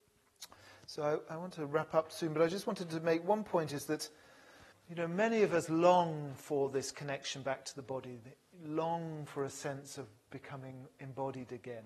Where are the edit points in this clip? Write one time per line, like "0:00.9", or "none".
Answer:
0:04.7